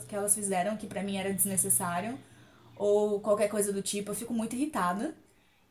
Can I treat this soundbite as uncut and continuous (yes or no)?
yes